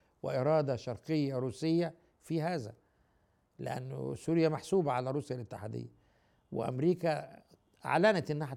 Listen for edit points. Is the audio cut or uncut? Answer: uncut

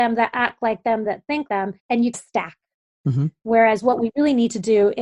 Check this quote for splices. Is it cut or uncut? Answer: cut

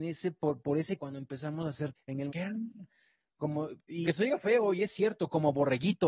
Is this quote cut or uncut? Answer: cut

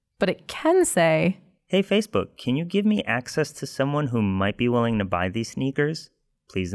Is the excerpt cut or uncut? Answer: uncut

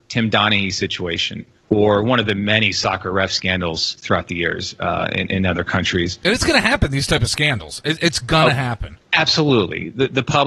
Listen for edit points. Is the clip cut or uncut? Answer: cut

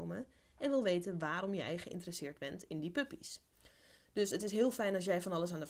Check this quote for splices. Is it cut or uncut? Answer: uncut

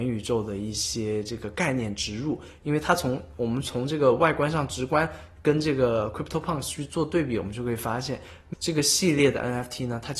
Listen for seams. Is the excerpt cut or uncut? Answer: cut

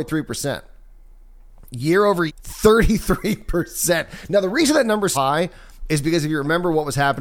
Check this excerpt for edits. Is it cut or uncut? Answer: cut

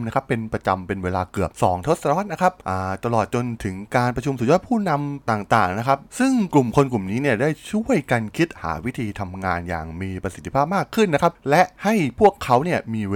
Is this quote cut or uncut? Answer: cut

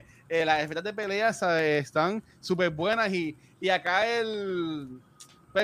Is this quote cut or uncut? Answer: uncut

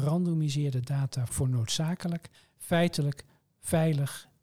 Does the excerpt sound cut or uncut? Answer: cut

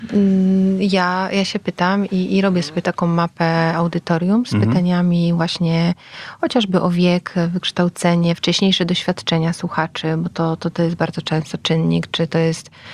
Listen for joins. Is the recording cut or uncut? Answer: uncut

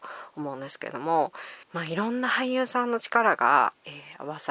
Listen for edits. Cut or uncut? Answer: cut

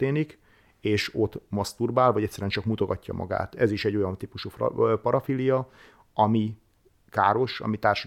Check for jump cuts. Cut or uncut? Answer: uncut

